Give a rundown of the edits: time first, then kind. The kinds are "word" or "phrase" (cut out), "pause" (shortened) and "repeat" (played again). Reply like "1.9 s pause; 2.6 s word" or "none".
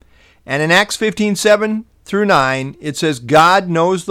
1.9 s pause